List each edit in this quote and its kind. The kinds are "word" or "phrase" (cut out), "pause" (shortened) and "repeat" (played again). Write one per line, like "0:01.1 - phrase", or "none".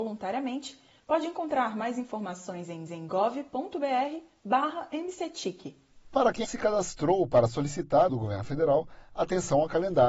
0:02.9 - repeat
0:06.4 - phrase
0:08.1 - phrase